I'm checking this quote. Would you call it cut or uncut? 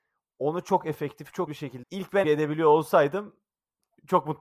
cut